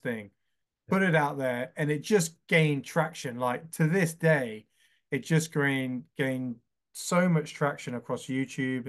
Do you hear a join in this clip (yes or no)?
no